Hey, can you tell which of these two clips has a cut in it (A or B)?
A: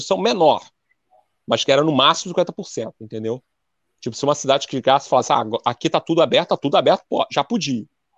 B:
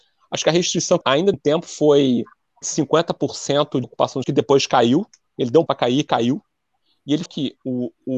B